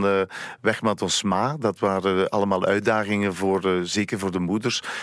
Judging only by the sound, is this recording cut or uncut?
uncut